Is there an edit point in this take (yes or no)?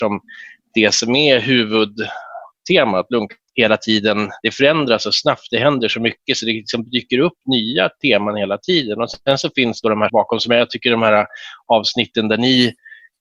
yes